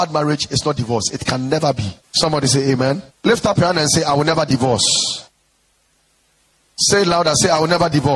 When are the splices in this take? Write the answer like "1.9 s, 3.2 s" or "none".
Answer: 2.0 s, 3.1 s